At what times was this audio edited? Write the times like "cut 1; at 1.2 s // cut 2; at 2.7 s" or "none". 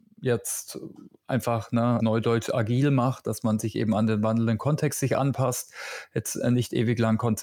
cut 1; at 2.0 s